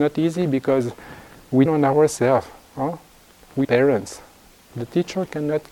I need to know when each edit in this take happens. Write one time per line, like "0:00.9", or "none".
0:01.7
0:03.6